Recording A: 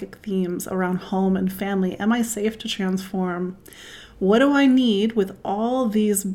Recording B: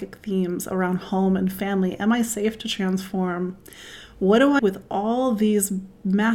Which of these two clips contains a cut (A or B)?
B